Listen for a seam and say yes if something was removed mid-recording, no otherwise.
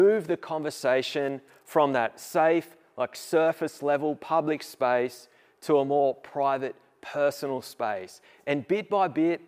no